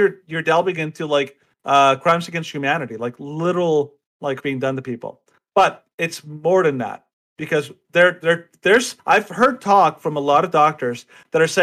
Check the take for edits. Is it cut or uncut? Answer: cut